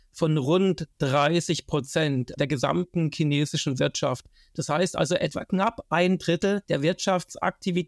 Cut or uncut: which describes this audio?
cut